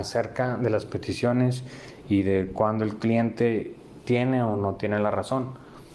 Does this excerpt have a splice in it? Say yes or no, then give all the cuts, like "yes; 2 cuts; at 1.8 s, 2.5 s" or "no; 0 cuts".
no; 0 cuts